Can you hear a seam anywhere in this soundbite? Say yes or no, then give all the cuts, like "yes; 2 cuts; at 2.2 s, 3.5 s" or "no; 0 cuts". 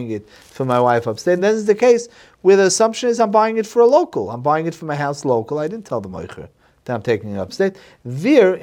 no; 0 cuts